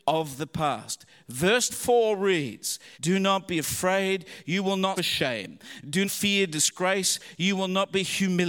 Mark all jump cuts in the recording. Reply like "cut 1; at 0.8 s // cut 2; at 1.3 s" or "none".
cut 1; at 1.7 s // cut 2; at 2.9 s // cut 3; at 5.0 s // cut 4; at 6.0 s